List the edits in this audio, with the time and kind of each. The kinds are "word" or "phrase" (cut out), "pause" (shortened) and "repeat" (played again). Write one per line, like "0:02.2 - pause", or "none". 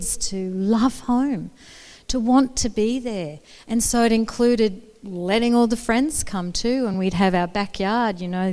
none